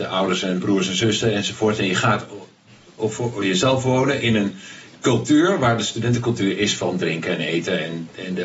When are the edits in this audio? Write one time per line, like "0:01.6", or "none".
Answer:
none

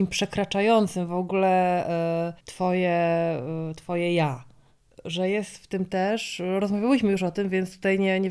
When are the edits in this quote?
0:02.4

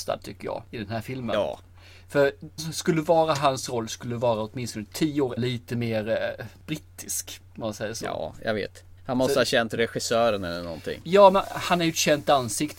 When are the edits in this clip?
0:02.6
0:05.4
0:07.5
0:09.0

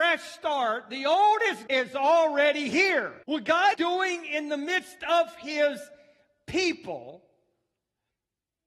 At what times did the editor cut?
0:01.7
0:03.2
0:03.7

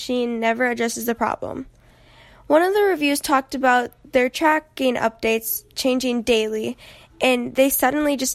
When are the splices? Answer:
none

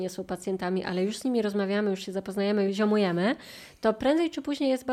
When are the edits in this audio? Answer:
0:02.7

